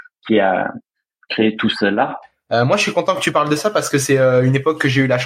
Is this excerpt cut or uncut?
uncut